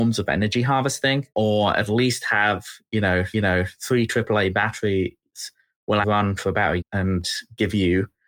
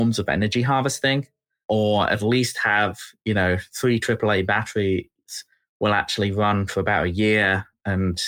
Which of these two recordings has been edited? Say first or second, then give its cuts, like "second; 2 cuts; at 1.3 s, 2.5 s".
first; 4 cuts; at 1.3 s, 3.3 s, 6.0 s, 6.8 s